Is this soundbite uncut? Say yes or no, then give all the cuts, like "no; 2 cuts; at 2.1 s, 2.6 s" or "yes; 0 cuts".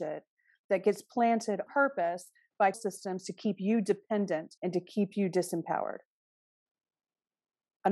no; 3 cuts; at 1.7 s, 2.7 s, 4.6 s